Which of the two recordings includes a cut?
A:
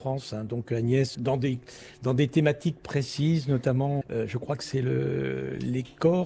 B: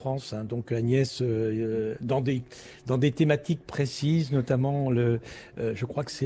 A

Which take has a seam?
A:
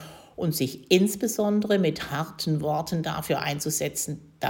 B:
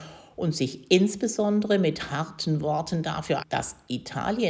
B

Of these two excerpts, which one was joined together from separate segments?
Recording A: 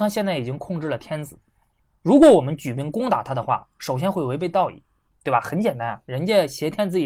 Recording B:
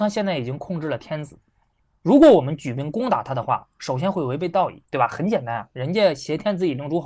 B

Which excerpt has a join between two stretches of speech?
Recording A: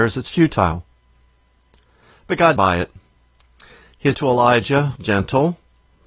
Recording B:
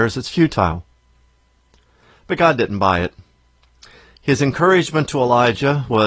A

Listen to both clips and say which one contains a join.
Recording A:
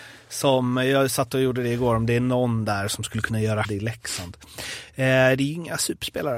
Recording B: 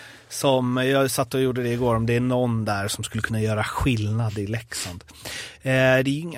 A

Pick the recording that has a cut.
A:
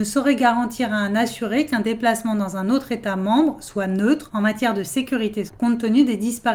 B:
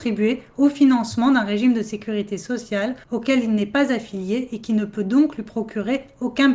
A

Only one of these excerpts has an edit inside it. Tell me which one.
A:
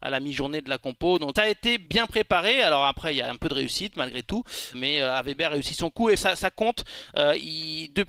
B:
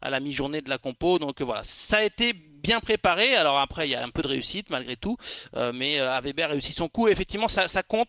A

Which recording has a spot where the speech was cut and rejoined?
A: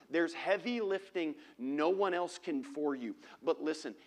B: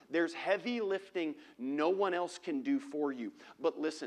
A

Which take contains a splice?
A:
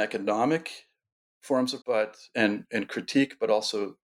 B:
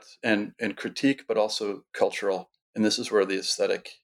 A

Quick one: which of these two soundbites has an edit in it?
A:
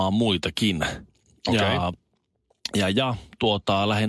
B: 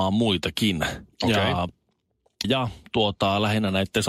B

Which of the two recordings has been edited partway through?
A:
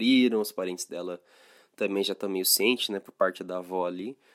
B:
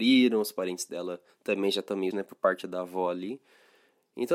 B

